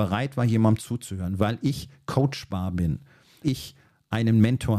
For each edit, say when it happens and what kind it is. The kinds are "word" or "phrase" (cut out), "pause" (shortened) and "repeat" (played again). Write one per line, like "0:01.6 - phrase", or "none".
0:03.4 - word